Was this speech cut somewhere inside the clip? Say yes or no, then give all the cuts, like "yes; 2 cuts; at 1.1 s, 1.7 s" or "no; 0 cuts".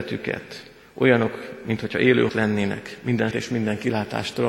yes; 2 cuts; at 2.3 s, 3.3 s